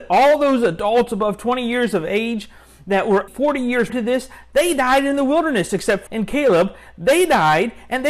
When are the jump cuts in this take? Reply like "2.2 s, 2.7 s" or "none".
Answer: 3.3 s, 3.9 s, 6.1 s